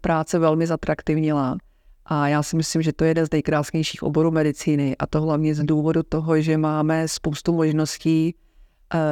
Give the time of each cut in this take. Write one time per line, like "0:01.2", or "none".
none